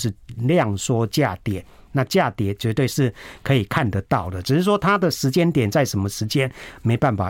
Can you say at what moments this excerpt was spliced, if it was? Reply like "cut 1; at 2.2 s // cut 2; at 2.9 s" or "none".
none